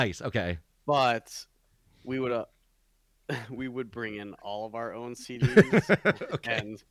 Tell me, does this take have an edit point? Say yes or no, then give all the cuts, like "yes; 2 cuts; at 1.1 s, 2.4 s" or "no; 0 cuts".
no; 0 cuts